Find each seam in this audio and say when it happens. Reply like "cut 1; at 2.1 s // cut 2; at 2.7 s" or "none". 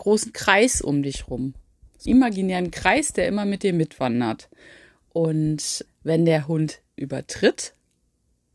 cut 1; at 2.1 s // cut 2; at 5.9 s // cut 3; at 7.0 s